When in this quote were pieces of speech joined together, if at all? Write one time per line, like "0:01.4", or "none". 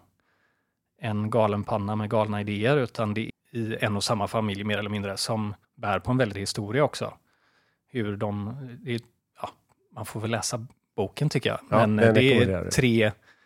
0:03.3
0:05.6
0:06.3

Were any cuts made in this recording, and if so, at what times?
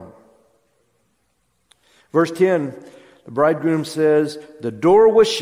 none

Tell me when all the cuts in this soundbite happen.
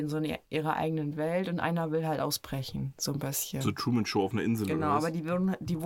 none

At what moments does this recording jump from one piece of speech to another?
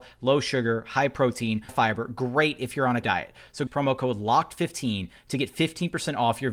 0:01.7
0:03.0
0:03.7

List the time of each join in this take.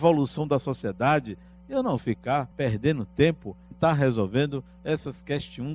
0:02.0
0:02.5
0:03.7

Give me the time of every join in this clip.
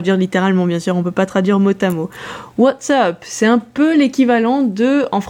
none

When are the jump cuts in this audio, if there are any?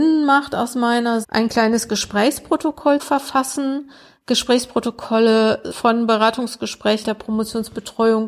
0:01.2
0:03.0
0:05.7
0:07.0

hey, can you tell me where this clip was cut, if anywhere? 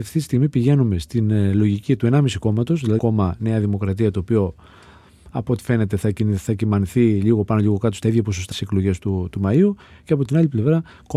0:03.0
0:08.5

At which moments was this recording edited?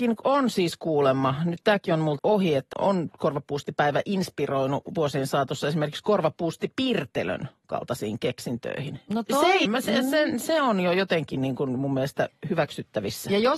0:02.2
0:02.7
0:09.7

